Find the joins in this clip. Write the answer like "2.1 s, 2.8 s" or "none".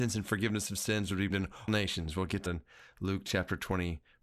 1.3 s, 1.7 s, 2.5 s